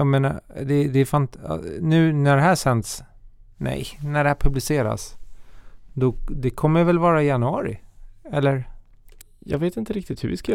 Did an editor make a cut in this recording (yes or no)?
no